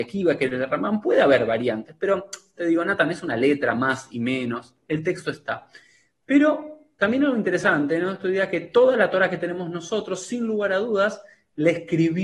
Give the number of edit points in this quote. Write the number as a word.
zero